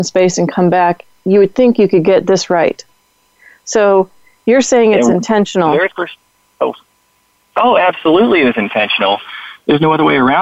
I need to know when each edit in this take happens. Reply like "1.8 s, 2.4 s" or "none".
none